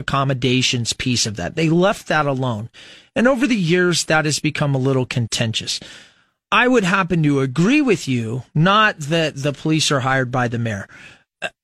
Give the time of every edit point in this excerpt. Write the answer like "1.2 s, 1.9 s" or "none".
none

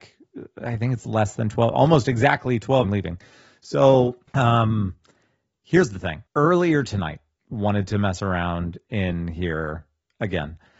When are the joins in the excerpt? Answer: 2.8 s, 4.3 s, 6.3 s, 7.4 s

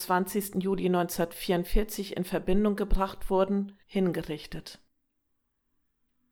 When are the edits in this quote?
3.8 s

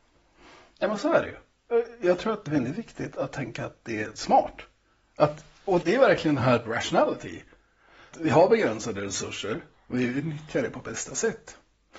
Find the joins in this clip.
2.5 s, 3.1 s, 5.8 s, 6.7 s, 8.1 s

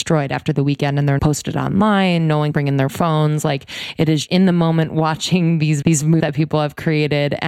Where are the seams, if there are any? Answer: 1.2 s, 2.5 s, 4.3 s, 5.8 s, 6.2 s

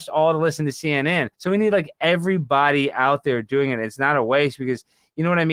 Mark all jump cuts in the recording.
1.3 s

